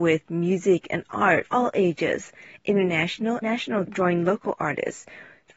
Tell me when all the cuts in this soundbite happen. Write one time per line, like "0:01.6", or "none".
0:01.5
0:03.4
0:03.8